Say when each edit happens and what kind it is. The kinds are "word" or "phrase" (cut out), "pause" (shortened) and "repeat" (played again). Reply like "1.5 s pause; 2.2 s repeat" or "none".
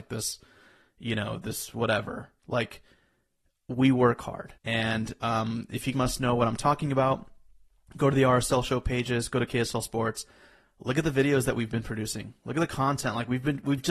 4.6 s pause; 5.9 s word